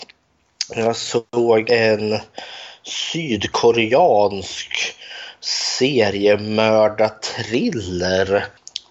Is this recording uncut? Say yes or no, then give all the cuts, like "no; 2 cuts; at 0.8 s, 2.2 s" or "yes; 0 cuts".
yes; 0 cuts